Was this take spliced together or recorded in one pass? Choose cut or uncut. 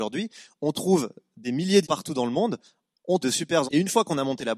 cut